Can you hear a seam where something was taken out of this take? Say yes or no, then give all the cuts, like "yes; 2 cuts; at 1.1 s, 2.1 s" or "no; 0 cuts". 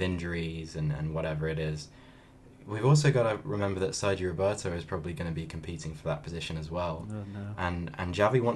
no; 0 cuts